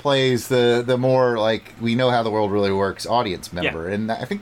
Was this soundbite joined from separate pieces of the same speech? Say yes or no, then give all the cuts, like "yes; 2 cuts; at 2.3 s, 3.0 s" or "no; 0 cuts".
yes; 1 cut; at 1.8 s